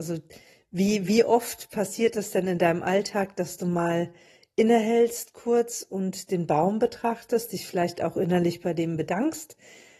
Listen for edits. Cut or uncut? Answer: uncut